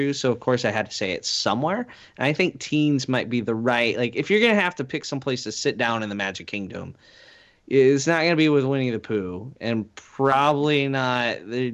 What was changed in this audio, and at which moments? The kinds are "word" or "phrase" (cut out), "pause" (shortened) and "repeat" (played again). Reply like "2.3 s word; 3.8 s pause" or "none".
none